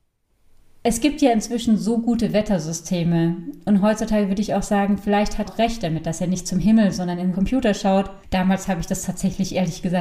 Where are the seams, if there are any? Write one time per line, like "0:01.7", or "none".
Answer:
0:05.5
0:07.3
0:08.2

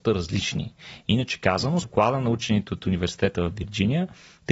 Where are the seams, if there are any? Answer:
0:01.8

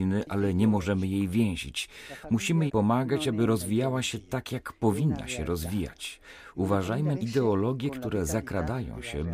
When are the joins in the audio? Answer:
0:02.7
0:07.1

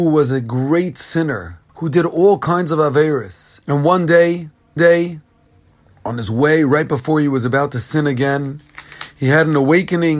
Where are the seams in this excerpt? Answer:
0:01.7
0:03.6
0:04.8

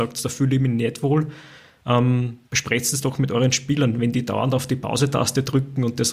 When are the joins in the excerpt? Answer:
0:02.4

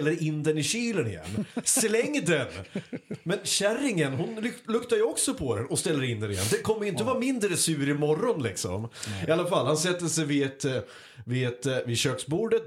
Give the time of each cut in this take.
none

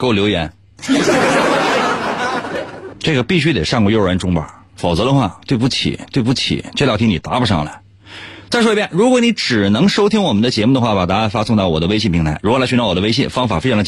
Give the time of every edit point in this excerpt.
0:06.1

